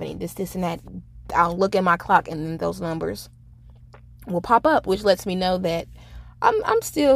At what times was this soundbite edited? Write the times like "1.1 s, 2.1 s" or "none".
none